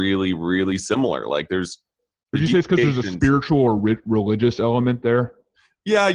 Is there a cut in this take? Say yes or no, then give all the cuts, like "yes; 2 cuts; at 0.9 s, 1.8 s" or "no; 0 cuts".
no; 0 cuts